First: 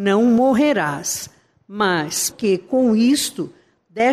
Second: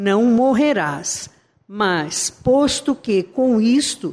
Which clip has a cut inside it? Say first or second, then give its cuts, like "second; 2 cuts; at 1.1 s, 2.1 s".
first; 1 cut; at 2.3 s